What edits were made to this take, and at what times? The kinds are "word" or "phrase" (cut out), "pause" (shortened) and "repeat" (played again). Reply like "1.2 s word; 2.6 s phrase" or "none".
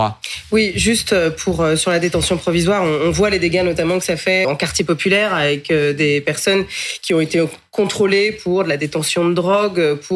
4.4 s word